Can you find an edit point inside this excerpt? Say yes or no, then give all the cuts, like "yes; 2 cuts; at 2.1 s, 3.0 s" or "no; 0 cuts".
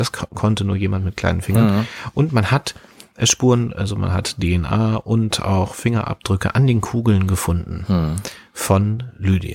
no; 0 cuts